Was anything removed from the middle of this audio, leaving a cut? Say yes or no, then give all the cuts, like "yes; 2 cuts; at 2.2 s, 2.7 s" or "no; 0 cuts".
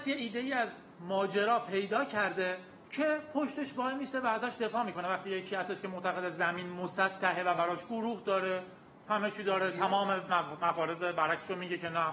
no; 0 cuts